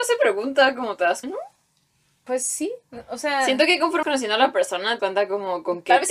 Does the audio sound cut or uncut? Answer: cut